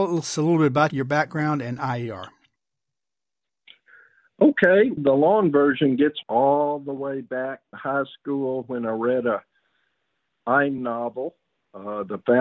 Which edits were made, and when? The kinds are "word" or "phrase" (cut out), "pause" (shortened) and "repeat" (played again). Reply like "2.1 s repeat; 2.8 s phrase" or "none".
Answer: 0.9 s word; 5.0 s word; 6.2 s word; 7.7 s word; 10.8 s word